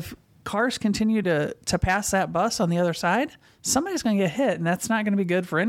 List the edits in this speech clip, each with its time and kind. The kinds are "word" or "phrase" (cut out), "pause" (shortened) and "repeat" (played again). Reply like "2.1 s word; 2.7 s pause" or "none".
none